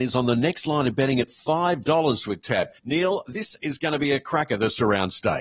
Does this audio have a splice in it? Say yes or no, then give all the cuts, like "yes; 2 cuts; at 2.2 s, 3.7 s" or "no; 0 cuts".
yes; 1 cut; at 2.8 s